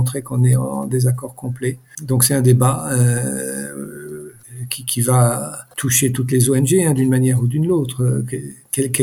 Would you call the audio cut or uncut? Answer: uncut